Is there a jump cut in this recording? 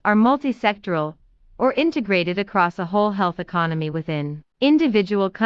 no; 0 cuts

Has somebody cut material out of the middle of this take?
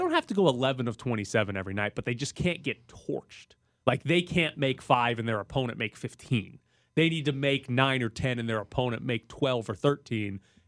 no; 0 cuts

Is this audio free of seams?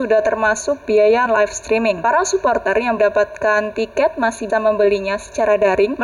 no; 3 cuts; at 1.3 s, 3.0 s, 4.5 s

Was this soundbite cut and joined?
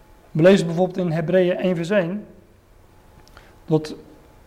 no; 0 cuts

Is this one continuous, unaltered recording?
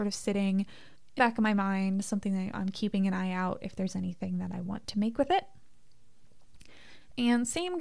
no; 1 cut; at 1.2 s

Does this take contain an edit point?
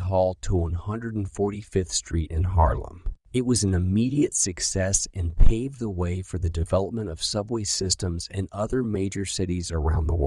yes; 1 cut; at 3.2 s

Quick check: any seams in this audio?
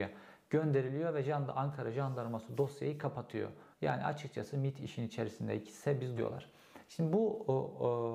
yes; 2 cuts; at 3.7 s, 6.2 s

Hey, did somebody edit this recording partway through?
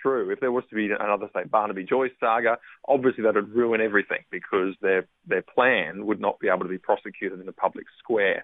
no; 0 cuts

